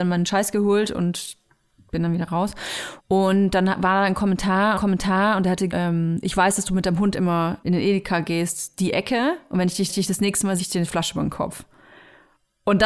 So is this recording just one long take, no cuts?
no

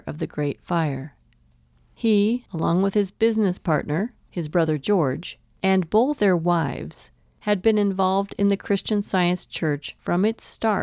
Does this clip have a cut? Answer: yes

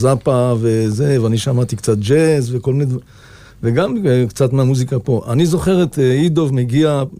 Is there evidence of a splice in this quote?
no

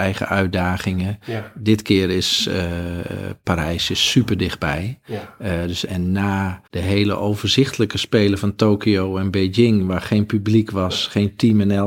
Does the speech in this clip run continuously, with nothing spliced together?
no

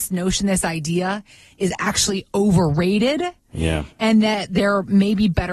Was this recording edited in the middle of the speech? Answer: no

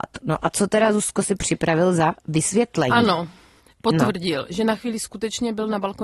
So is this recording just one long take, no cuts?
yes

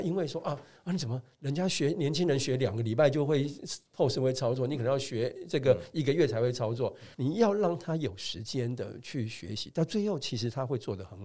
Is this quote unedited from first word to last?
no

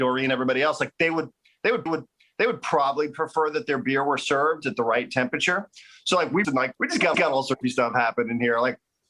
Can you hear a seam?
yes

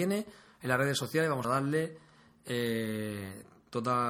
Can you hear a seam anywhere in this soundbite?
yes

